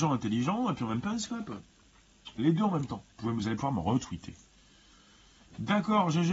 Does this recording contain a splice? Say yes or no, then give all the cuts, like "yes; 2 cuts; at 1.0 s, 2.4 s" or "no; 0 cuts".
yes; 2 cuts; at 1.0 s, 3.1 s